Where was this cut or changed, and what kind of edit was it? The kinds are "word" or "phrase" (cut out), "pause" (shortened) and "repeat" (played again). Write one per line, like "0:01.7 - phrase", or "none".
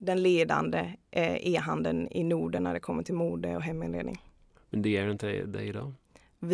none